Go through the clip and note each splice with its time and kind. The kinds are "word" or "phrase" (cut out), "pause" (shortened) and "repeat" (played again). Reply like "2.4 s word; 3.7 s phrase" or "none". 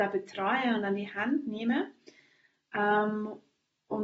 none

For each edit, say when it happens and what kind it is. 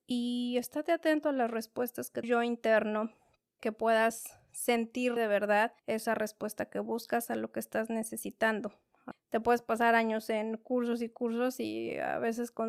2.2 s phrase; 3.6 s word; 5.2 s word; 5.8 s pause; 9.1 s word

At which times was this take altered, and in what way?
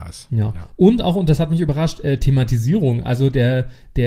none

